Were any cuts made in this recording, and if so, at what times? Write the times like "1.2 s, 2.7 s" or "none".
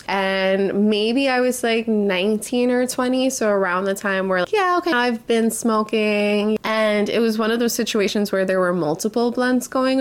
4.4 s, 4.9 s